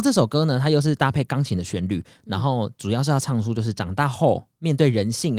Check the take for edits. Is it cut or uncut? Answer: uncut